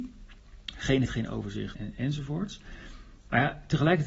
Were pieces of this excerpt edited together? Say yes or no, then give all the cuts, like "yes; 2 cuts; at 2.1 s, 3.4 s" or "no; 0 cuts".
yes; 2 cuts; at 1.1 s, 1.7 s